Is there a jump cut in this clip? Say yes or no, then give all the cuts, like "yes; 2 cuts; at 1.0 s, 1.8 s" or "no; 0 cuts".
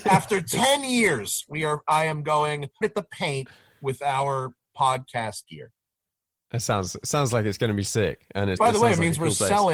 yes; 2 cuts; at 2.8 s, 8.6 s